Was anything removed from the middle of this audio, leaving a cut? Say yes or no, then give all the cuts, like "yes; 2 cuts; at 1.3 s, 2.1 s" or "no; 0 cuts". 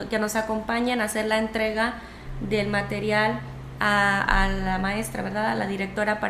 no; 0 cuts